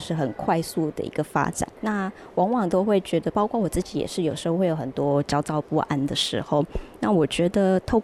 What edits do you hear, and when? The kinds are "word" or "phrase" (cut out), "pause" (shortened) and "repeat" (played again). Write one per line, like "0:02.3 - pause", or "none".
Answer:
0:01.8 - pause